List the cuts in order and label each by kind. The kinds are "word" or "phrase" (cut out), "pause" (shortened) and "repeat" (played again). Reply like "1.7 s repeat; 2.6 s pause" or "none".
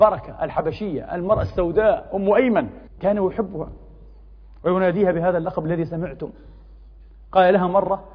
2.9 s pause

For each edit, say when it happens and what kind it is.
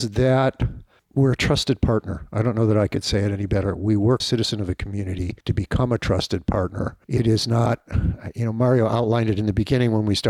4.2 s phrase; 5.4 s pause; 7.0 s pause

